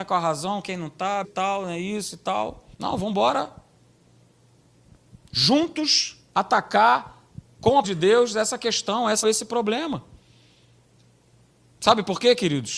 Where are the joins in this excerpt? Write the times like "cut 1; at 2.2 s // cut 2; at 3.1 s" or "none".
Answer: cut 1; at 1.2 s // cut 2; at 2.7 s // cut 3; at 6.3 s // cut 4; at 7.8 s // cut 5; at 9.2 s